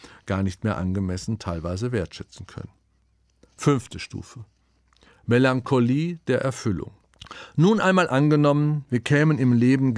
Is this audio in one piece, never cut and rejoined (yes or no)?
yes